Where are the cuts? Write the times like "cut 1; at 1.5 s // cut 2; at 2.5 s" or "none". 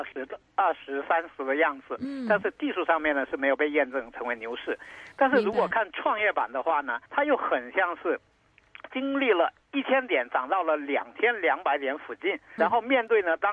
cut 1; at 7.1 s // cut 2; at 9.6 s // cut 3; at 12.6 s

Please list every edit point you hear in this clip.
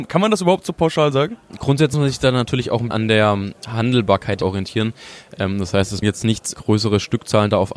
cut 1; at 1.9 s // cut 2; at 2.9 s // cut 3; at 4.4 s // cut 4; at 6.0 s // cut 5; at 6.5 s

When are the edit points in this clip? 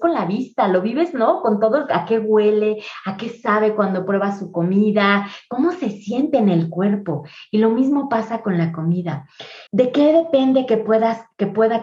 cut 1; at 9.7 s

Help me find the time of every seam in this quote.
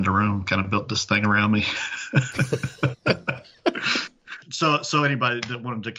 cut 1; at 4.4 s

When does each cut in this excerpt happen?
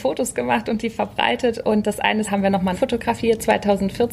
cut 1; at 2.2 s // cut 2; at 2.7 s

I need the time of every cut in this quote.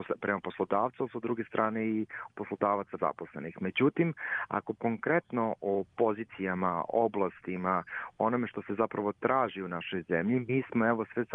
cut 1; at 2.3 s // cut 2; at 3.0 s // cut 3; at 4.7 s

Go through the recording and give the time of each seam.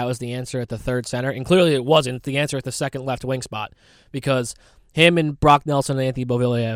none

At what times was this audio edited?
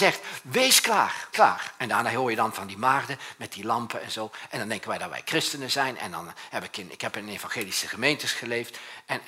cut 1; at 1.3 s

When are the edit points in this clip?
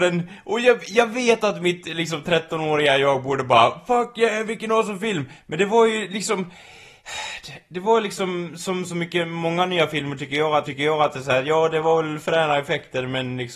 cut 1; at 10.6 s

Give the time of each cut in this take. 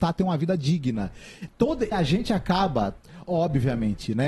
cut 1; at 1.9 s

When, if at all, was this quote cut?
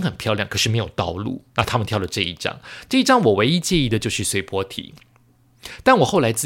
cut 1; at 1.5 s

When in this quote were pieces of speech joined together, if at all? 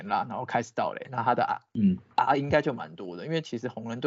none

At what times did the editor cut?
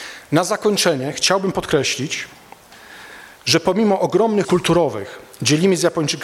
cut 1; at 3.3 s // cut 2; at 4.4 s

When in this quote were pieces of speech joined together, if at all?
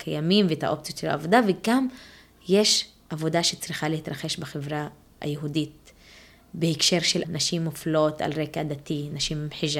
cut 1; at 7.2 s

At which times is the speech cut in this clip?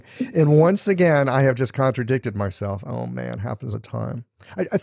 cut 1; at 3.7 s

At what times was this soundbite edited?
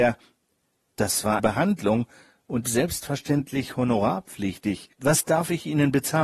cut 1; at 1.4 s // cut 2; at 2.6 s // cut 3; at 4.9 s

